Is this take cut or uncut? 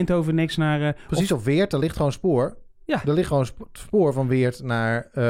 uncut